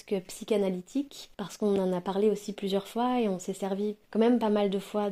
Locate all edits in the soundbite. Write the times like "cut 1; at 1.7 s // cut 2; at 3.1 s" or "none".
cut 1; at 1.3 s // cut 2; at 4.0 s

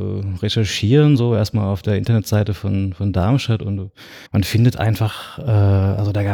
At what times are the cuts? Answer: cut 1; at 4.3 s

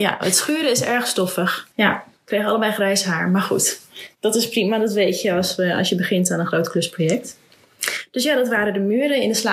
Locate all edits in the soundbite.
cut 1; at 1.7 s

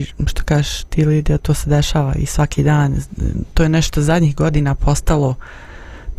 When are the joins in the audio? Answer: cut 1; at 1.4 s // cut 2; at 3.5 s

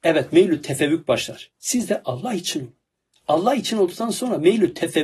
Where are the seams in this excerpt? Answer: cut 1; at 2.9 s

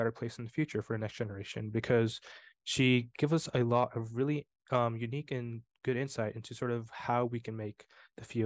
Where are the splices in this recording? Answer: none

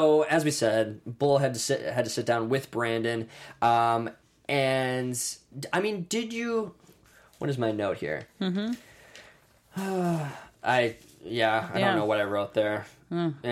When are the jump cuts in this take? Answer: none

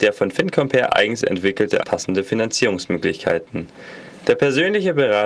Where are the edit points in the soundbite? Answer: cut 1; at 1.8 s

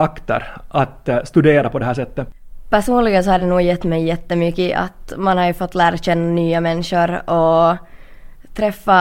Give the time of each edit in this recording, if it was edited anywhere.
none

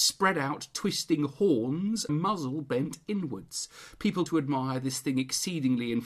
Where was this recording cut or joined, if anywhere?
cut 1; at 2.1 s // cut 2; at 4.3 s

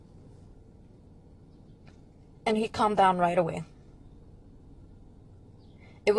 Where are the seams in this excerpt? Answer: none

